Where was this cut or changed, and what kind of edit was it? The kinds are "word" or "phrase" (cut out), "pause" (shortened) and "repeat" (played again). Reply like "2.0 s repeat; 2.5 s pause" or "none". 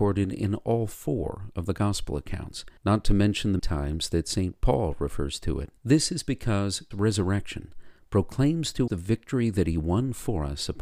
2.8 s pause; 3.6 s word; 5.8 s pause; 6.9 s word; 8.9 s word